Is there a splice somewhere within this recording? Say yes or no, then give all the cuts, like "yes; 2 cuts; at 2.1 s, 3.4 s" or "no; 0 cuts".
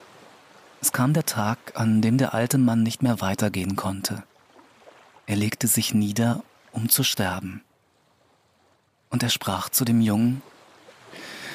no; 0 cuts